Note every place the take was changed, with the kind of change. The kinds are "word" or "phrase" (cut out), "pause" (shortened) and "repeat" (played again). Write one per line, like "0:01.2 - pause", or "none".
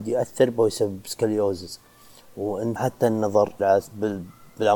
0:02.8 - phrase
0:03.6 - word